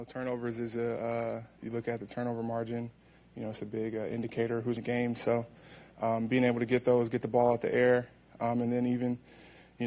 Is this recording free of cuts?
no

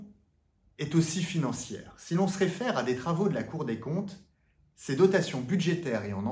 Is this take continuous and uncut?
yes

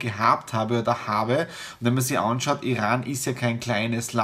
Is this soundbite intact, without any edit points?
yes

